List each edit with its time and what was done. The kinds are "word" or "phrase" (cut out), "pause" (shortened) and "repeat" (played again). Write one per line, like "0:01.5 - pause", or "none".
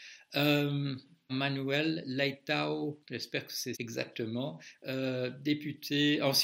0:01.3 - word
0:03.0 - word
0:03.7 - word